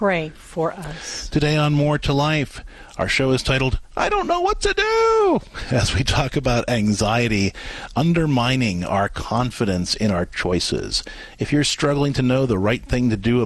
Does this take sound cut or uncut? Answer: uncut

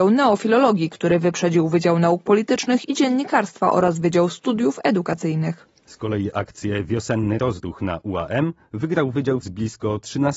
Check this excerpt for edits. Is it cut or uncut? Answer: cut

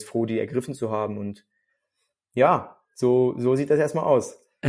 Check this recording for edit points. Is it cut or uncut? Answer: uncut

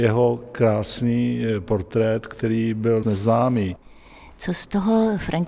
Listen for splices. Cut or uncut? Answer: cut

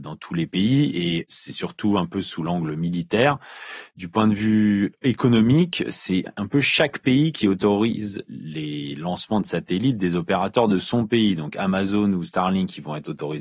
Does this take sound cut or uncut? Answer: uncut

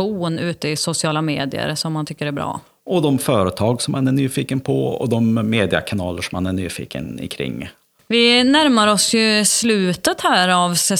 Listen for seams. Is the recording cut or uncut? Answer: uncut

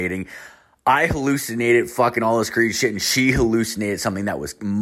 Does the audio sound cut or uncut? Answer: uncut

